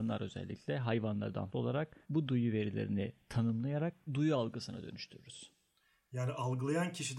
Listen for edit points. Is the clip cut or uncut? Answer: cut